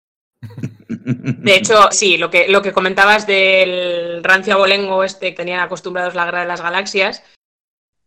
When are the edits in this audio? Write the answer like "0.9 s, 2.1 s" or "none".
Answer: 1.9 s, 5.3 s